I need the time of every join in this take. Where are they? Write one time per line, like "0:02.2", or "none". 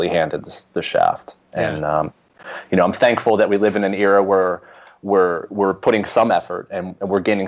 none